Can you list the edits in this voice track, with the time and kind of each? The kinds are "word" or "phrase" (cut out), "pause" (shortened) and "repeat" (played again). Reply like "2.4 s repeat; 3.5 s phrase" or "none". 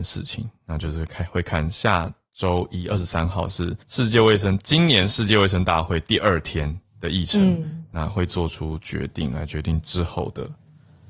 3.8 s pause